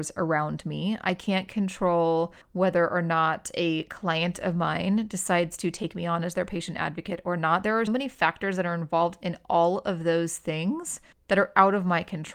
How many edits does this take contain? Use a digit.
3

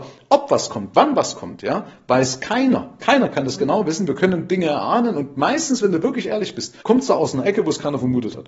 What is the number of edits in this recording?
1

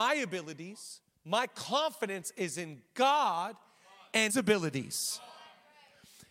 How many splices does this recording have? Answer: 2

